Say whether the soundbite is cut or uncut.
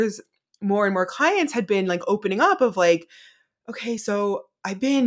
uncut